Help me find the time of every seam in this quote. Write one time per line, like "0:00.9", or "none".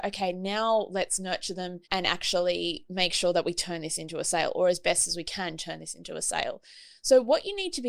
0:01.8